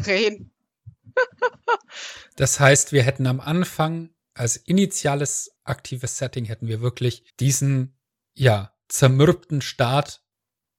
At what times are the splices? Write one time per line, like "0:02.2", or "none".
0:05.6
0:07.3
0:08.8